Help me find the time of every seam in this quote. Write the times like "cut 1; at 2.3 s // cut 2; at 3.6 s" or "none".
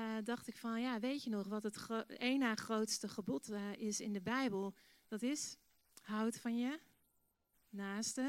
none